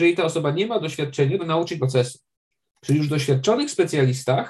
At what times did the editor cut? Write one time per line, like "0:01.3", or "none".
0:01.4
0:01.8